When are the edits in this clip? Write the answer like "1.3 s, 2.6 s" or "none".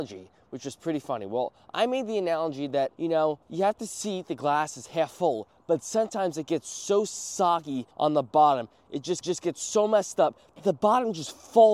2.9 s, 3.4 s, 7.9 s, 9.2 s